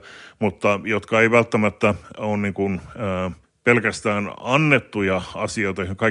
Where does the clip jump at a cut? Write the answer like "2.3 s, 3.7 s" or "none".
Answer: 3.4 s